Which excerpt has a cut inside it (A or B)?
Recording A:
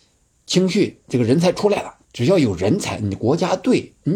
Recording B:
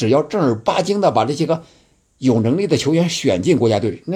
A